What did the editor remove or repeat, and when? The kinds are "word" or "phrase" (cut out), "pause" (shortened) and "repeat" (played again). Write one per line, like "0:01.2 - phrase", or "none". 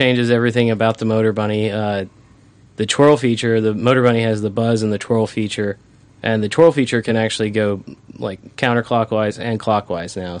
none